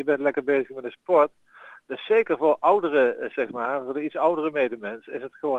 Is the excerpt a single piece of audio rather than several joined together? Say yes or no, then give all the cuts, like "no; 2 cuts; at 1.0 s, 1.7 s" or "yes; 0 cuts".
yes; 0 cuts